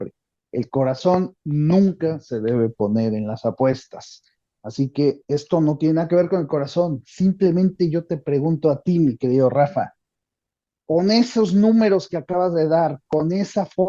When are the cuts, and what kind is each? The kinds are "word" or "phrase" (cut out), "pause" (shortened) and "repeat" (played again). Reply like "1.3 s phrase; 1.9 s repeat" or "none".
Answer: none